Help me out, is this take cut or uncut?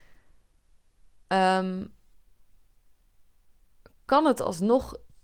uncut